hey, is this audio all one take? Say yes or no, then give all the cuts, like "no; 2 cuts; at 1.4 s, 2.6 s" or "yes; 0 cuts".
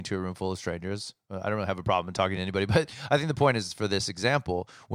yes; 0 cuts